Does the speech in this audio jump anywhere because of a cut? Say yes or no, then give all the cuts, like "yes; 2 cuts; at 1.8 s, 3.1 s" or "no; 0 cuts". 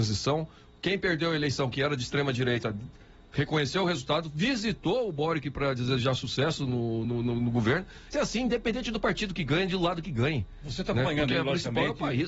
yes; 2 cuts; at 7.0 s, 8.1 s